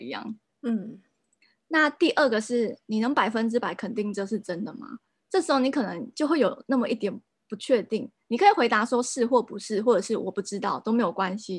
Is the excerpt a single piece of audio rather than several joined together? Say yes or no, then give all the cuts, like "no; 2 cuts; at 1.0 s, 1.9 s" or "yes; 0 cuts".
no; 1 cut; at 6.1 s